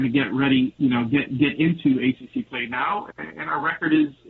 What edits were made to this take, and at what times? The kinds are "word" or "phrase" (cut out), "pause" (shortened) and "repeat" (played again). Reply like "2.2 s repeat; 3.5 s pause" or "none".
none